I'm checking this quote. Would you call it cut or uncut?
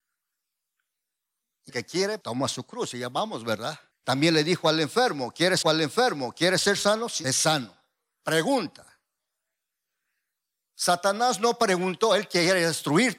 cut